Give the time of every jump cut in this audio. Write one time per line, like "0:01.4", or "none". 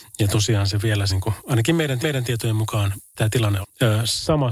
0:01.1
0:02.0
0:03.1
0:03.6